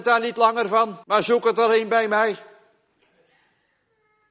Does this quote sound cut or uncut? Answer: cut